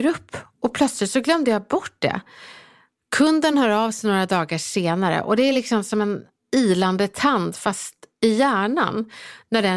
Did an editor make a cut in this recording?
no; 0 cuts

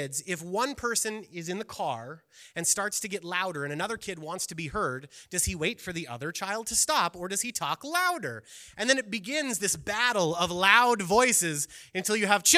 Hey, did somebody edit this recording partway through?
no; 0 cuts

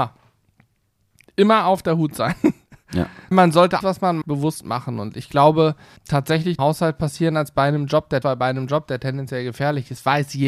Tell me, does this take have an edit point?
yes; 6 cuts; at 3.3 s, 3.8 s, 4.2 s, 6.0 s, 6.6 s, 8.2 s

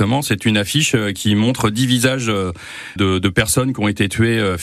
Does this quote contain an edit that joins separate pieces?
yes; 1 cut; at 3.0 s

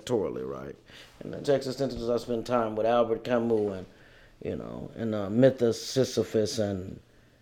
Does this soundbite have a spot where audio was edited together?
yes; 1 cut; at 1.4 s

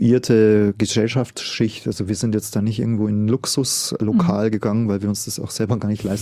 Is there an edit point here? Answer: no; 0 cuts

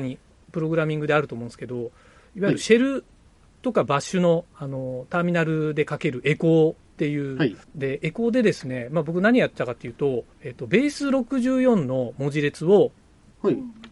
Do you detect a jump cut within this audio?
yes; 3 cuts; at 4.5 s, 7.6 s, 10.3 s

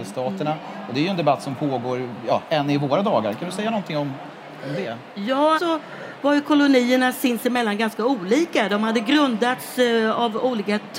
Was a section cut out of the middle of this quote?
yes; 1 cut; at 5.6 s

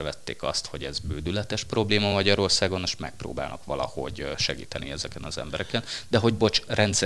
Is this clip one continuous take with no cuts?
yes; 0 cuts

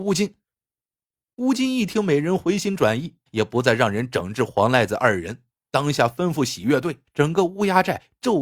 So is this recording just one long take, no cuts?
no; 2 cuts; at 3.3 s, 7.0 s

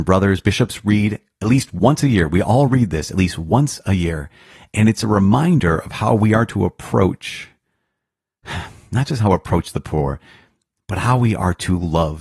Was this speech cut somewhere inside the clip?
no; 0 cuts

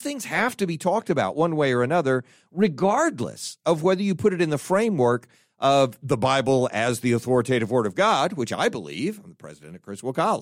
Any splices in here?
no; 0 cuts

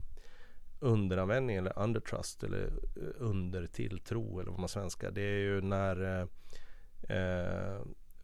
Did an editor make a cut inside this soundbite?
yes; 1 cut; at 4.7 s

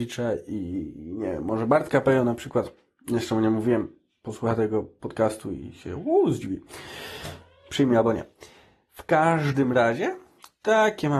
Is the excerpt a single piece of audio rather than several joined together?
yes; 0 cuts

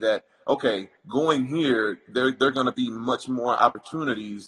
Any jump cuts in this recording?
yes; 1 cut; at 1.0 s

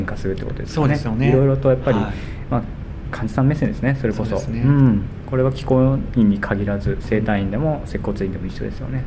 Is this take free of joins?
yes; 0 cuts

